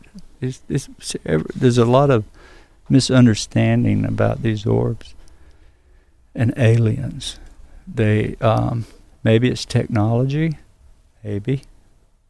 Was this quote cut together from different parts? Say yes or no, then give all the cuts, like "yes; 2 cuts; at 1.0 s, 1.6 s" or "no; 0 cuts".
no; 0 cuts